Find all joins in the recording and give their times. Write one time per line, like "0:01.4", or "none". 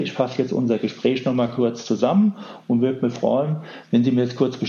none